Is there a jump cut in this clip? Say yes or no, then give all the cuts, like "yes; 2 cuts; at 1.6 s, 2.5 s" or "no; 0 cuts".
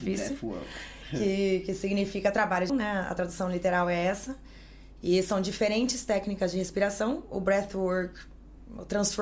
yes; 1 cut; at 2.7 s